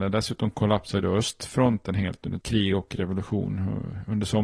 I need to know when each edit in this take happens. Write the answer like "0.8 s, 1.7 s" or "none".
2.4 s